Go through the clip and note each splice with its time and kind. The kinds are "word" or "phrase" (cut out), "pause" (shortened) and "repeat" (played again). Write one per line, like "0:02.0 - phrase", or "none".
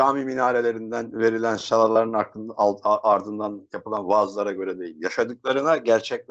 none